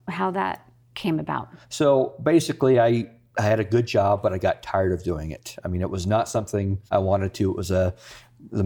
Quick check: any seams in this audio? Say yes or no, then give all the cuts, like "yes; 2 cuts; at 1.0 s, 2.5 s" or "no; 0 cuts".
yes; 2 cuts; at 1.6 s, 6.9 s